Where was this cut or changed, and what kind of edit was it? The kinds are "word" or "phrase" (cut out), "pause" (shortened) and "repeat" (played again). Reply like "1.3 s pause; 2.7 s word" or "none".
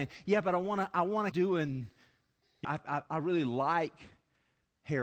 1.3 s word; 2.6 s word; 3.1 s word